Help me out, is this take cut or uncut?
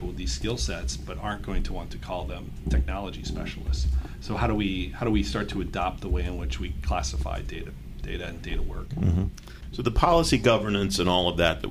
uncut